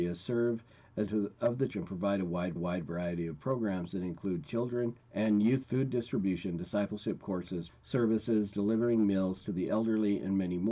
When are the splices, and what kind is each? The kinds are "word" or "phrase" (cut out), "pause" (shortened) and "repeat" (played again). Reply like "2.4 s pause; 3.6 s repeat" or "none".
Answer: 1.1 s phrase; 1.7 s word; 2.6 s repeat; 5.0 s pause; 5.6 s word; 7.7 s phrase